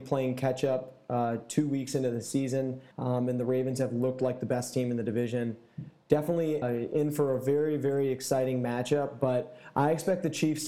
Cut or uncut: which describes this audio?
cut